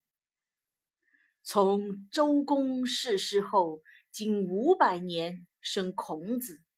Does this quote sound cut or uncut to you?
uncut